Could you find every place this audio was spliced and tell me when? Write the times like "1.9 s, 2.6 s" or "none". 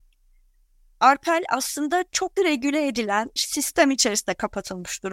2.4 s, 3.4 s